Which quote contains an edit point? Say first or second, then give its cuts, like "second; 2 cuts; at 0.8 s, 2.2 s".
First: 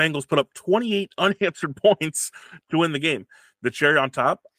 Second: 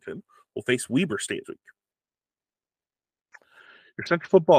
second; 1 cut; at 1.4 s